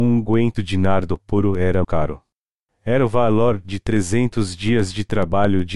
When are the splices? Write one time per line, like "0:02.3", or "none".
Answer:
0:01.8